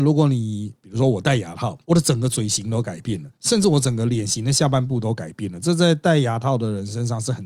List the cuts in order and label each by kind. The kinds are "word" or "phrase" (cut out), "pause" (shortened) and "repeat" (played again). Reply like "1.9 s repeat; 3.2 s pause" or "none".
1.8 s pause; 3.3 s pause